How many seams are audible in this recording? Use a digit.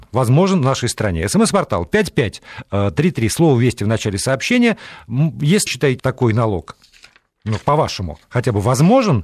3